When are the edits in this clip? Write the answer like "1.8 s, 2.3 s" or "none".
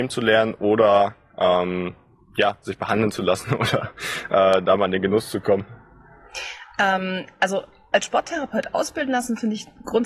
none